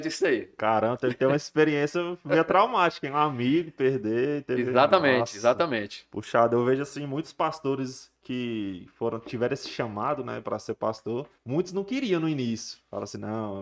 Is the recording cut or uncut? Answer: cut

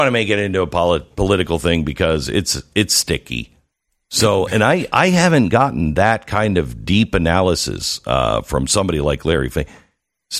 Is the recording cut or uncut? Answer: cut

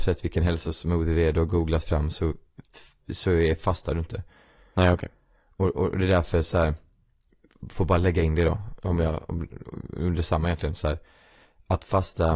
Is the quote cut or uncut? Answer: uncut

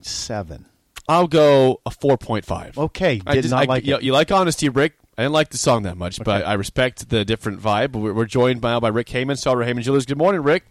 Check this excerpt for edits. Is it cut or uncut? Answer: uncut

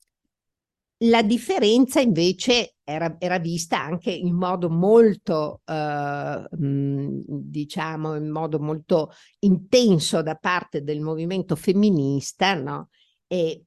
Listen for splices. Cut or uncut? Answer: uncut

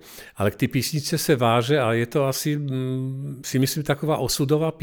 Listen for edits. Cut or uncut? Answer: uncut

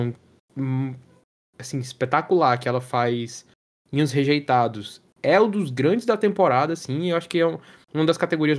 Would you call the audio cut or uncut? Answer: uncut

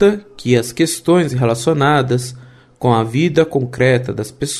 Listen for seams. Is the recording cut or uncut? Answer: uncut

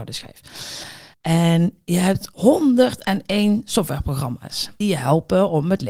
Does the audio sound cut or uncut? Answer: cut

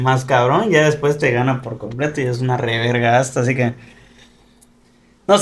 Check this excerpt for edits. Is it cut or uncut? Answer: uncut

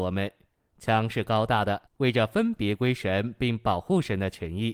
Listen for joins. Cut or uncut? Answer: cut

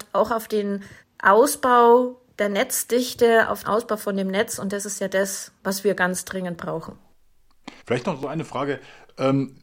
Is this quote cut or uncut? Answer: cut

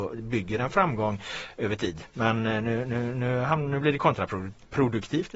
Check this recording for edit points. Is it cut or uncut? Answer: uncut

